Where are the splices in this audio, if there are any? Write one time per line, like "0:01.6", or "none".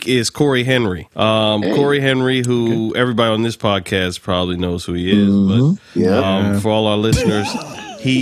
0:01.1